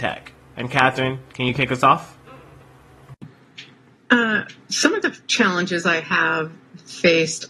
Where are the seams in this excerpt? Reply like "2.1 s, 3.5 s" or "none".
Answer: none